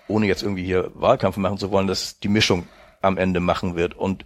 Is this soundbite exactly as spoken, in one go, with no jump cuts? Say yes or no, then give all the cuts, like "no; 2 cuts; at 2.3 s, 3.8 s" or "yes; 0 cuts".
yes; 0 cuts